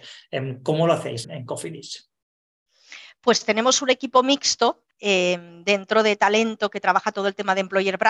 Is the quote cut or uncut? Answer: cut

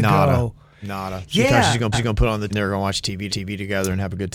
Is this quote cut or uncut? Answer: cut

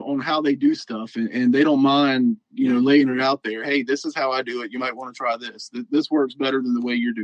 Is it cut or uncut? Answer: uncut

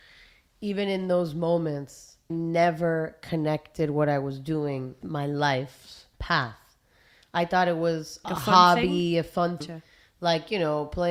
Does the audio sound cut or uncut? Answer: cut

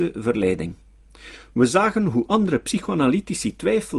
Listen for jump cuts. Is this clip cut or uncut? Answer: uncut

